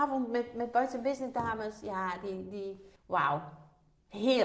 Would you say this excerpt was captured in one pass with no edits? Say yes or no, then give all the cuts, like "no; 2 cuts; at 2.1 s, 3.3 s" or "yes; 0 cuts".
no; 1 cut; at 3.0 s